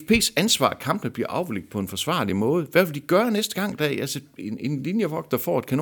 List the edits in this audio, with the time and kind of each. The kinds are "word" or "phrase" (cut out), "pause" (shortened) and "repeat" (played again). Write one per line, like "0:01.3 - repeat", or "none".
none